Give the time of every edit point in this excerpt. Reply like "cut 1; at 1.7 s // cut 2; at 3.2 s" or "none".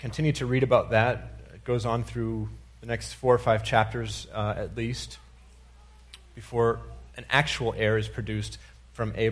cut 1; at 7.1 s